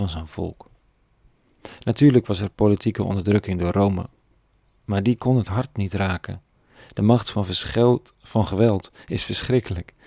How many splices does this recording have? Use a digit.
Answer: 0